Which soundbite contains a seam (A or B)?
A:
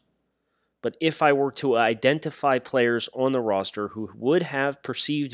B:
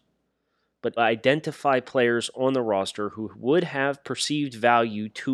B